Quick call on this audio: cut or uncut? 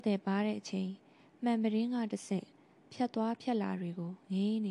uncut